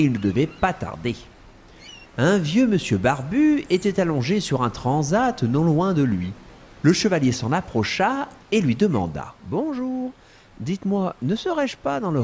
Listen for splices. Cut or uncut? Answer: uncut